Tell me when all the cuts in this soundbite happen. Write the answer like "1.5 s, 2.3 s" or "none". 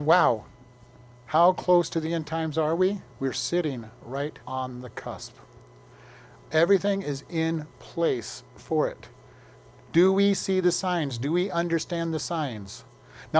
3.1 s, 4.4 s